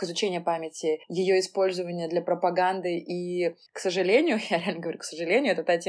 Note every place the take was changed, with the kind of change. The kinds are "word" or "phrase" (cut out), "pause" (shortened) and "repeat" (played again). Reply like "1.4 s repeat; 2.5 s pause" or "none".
1.0 s pause; 3.7 s pause